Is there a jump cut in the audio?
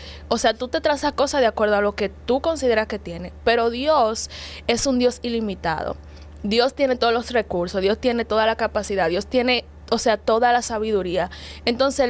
no; 0 cuts

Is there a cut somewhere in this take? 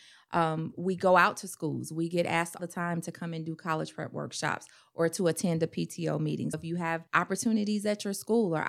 yes; 3 cuts; at 2.6 s, 6.5 s, 7.1 s

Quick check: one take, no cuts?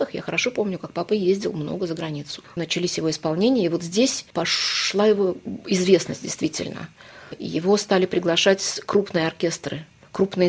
yes; 0 cuts

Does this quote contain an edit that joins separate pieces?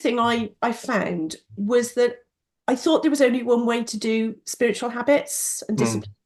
no; 0 cuts

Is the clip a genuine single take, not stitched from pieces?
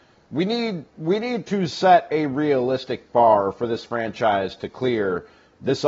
yes; 0 cuts

